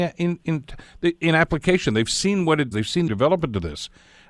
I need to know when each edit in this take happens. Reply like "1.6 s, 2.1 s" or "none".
2.7 s, 3.1 s